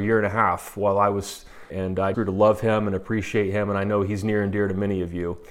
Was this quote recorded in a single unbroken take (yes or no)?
no